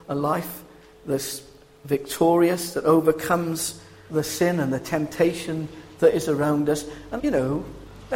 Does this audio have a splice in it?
yes; 2 cuts; at 4.1 s, 7.2 s

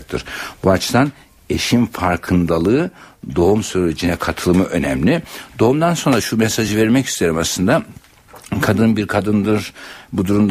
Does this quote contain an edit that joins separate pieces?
no; 0 cuts

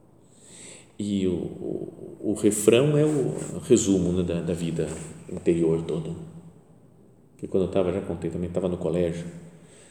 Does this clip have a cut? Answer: no; 0 cuts

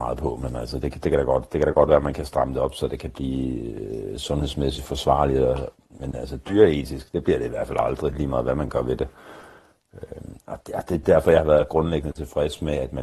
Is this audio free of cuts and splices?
yes; 0 cuts

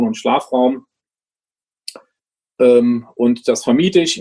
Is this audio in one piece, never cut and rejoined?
yes; 0 cuts

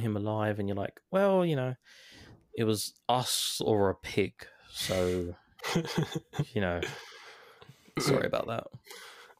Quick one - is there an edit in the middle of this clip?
no; 0 cuts

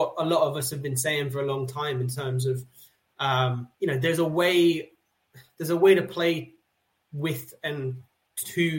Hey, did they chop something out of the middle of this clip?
yes; 1 cut; at 3.7 s

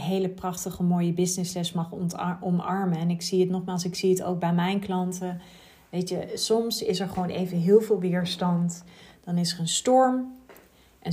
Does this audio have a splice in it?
no; 0 cuts

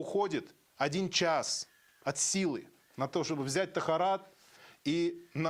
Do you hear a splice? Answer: no; 0 cuts

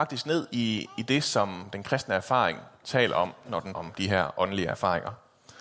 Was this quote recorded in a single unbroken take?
no; 1 cut; at 3.7 s

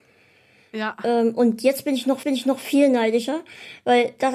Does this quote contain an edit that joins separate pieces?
yes; 1 cut; at 2.2 s

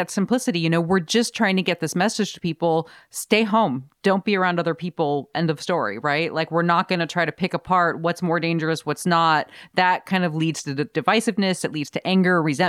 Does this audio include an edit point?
no; 0 cuts

